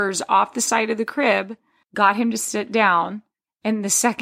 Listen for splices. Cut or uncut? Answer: cut